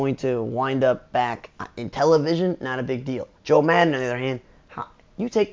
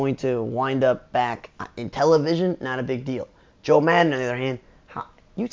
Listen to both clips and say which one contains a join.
first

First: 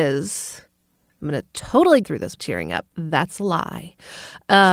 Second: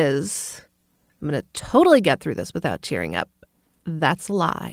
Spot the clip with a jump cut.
first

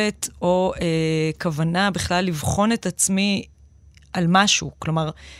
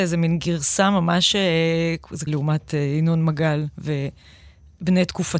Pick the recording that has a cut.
second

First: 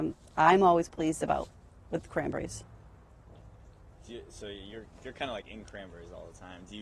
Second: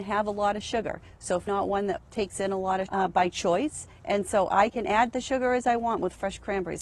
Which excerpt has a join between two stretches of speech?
second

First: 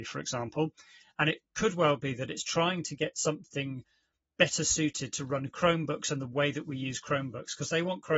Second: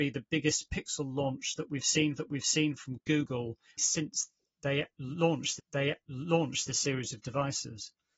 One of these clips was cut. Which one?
second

